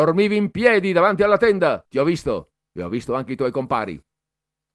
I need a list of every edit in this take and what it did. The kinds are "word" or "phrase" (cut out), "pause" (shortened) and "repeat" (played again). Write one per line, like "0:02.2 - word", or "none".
0:01.9 - pause